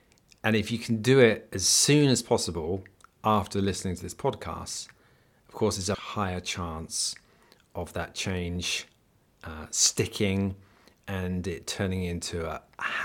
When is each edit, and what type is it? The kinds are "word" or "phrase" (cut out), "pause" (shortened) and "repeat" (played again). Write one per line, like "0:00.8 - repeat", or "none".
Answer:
0:05.9 - word